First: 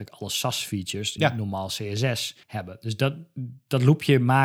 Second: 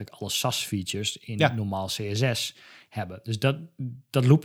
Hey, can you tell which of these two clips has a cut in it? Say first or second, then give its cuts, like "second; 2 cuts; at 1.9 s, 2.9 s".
first; 2 cuts; at 1.2 s, 2.4 s